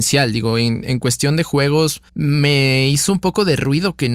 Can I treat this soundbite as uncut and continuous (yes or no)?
no